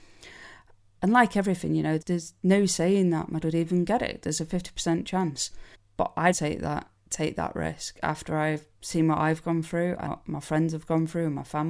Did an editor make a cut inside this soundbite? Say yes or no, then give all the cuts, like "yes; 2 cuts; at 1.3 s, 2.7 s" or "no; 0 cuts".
yes; 7 cuts; at 2.0 s, 3.4 s, 5.7 s, 6.3 s, 7.0 s, 8.7 s, 10.1 s